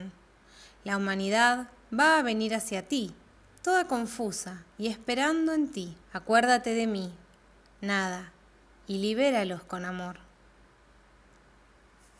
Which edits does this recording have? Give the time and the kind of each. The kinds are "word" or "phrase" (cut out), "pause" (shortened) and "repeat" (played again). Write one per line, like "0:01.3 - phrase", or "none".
0:06.0 - pause